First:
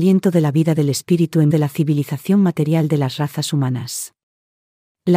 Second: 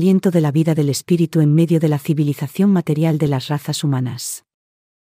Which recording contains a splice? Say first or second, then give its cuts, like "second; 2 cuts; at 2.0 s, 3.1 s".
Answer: first; 1 cut; at 1.5 s